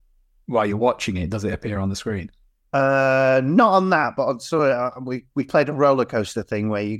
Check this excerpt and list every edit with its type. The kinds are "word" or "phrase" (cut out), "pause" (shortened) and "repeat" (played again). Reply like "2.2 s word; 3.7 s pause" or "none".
none